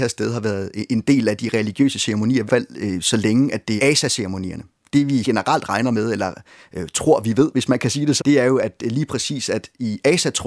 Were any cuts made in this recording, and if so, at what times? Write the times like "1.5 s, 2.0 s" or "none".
2.5 s, 3.8 s, 5.2 s, 8.2 s